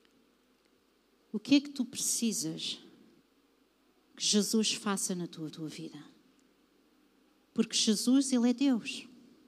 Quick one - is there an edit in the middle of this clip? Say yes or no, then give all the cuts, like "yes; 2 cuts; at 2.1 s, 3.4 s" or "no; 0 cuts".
yes; 2 cuts; at 3.2 s, 5.5 s